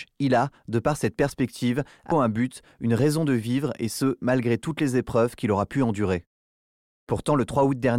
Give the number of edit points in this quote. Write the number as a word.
one